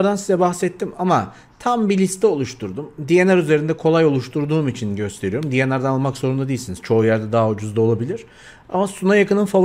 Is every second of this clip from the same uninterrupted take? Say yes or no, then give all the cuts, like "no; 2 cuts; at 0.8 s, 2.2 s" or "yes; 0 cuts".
yes; 0 cuts